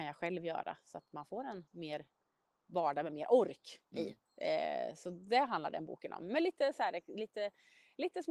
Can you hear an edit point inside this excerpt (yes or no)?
yes